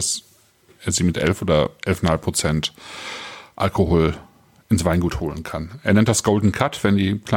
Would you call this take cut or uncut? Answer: uncut